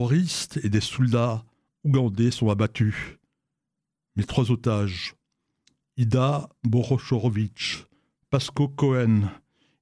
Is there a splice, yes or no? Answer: no